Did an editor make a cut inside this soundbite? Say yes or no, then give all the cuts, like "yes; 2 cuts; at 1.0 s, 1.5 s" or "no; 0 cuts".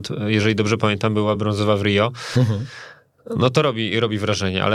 no; 0 cuts